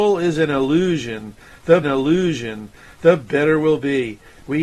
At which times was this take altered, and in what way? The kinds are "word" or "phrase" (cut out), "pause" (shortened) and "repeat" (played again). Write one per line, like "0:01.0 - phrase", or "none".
0:01.8 - repeat